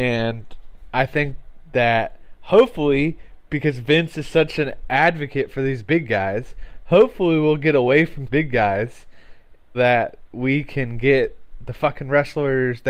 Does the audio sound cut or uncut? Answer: cut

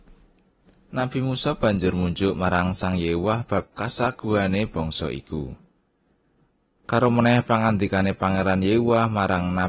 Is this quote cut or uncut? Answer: uncut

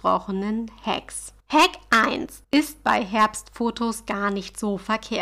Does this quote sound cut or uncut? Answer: cut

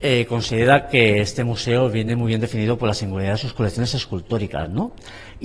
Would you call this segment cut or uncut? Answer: uncut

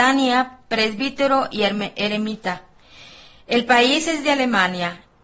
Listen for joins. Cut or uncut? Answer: uncut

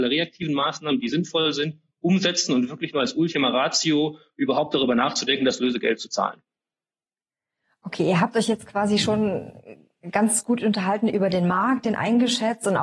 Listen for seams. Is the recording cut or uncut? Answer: uncut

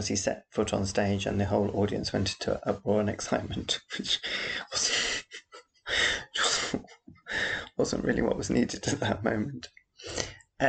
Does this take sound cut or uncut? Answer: uncut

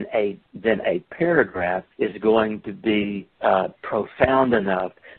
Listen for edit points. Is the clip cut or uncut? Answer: cut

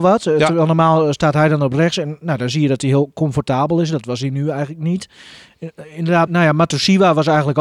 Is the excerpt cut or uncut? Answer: cut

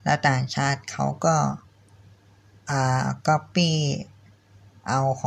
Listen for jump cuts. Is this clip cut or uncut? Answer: uncut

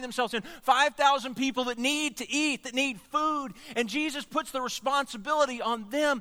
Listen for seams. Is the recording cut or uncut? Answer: uncut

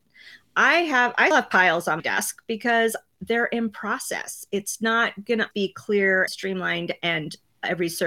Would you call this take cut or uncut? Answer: cut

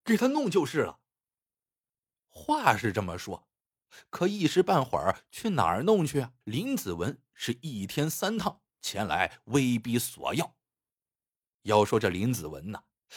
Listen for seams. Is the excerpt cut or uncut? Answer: cut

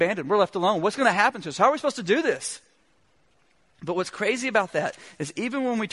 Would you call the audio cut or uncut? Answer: uncut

